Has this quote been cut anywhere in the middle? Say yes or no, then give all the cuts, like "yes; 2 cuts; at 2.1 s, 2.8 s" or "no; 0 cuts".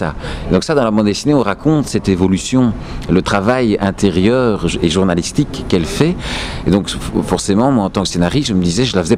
no; 0 cuts